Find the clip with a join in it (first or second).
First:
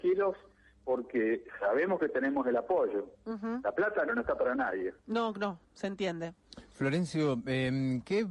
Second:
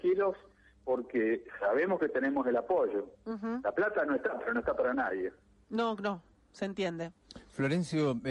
first